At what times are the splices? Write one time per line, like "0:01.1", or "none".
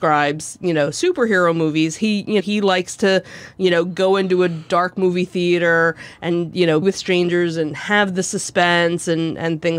0:02.4
0:06.8